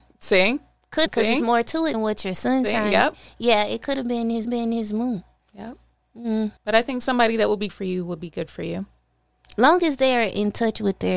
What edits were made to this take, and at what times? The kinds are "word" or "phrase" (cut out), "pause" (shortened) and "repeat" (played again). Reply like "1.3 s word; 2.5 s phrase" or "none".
1.1 s phrase; 1.9 s word; 4.4 s repeat; 6.6 s pause; 7.7 s word